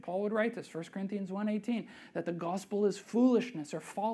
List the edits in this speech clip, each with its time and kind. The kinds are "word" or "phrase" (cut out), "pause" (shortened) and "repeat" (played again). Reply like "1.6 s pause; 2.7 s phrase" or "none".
none